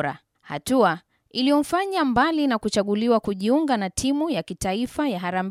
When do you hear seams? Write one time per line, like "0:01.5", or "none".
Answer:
none